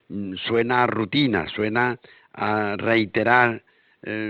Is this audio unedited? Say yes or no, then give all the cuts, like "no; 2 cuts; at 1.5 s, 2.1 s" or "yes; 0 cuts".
yes; 0 cuts